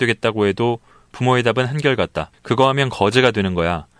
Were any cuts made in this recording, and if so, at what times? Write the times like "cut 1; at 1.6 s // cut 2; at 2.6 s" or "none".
none